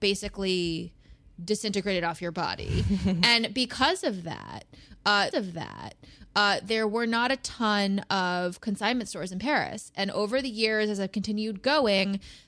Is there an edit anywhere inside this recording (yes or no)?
yes